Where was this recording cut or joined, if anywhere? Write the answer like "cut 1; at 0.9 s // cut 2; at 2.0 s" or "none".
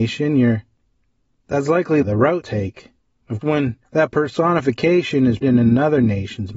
cut 1; at 2.0 s // cut 2; at 2.4 s // cut 3; at 3.4 s // cut 4; at 5.4 s